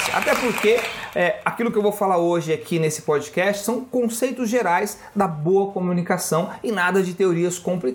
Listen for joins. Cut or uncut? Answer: uncut